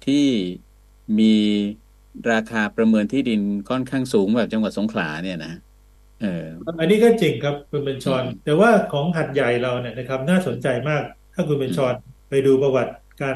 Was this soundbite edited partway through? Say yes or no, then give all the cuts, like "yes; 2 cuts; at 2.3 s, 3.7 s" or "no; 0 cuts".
yes; 4 cuts; at 6.0 s, 7.7 s, 8.4 s, 12.2 s